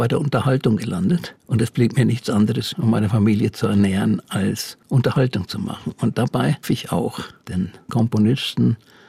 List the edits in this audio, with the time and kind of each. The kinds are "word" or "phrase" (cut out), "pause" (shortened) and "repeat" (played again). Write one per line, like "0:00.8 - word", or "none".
0:01.4 - pause
0:02.7 - word
0:04.8 - pause
0:06.6 - word
0:07.9 - word